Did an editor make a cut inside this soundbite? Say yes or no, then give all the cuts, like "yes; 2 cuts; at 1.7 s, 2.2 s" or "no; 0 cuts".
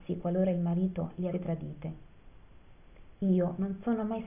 yes; 1 cut; at 1.3 s